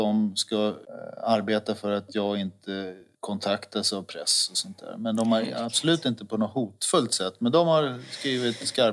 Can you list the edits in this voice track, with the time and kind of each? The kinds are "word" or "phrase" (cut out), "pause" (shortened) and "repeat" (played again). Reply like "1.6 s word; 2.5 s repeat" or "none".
none